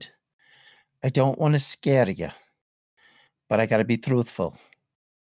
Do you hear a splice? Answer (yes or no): no